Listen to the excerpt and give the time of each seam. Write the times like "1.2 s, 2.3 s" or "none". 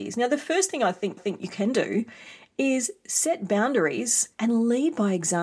1.2 s, 4.3 s

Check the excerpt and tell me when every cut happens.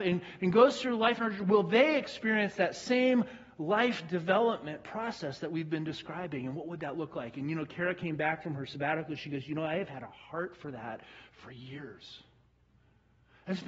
none

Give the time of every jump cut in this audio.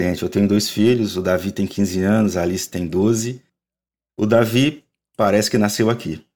none

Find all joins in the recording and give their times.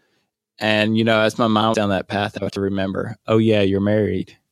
1.7 s, 2.5 s

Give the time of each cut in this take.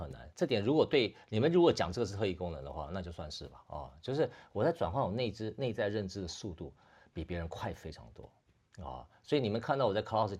none

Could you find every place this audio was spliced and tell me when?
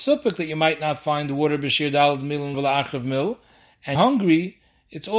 2.5 s, 3.9 s

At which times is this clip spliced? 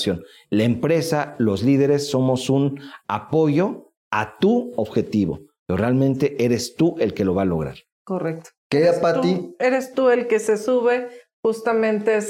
8.6 s

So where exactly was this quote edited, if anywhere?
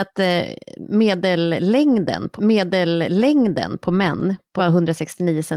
2.4 s, 4.6 s

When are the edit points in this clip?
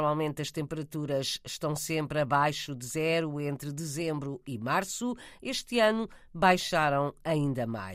none

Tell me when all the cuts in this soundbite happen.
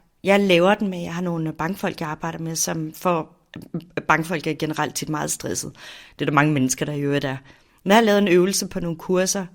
none

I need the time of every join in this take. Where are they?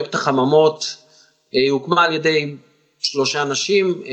none

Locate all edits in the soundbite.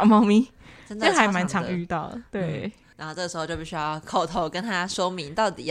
none

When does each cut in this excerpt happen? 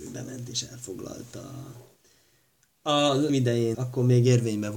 3.3 s, 3.7 s

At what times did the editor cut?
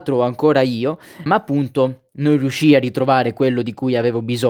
1.3 s

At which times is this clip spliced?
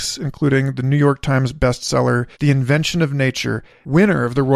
2.3 s

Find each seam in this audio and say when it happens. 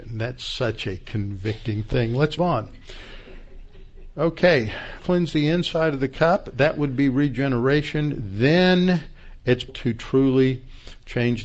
2.4 s, 5.0 s, 9.7 s

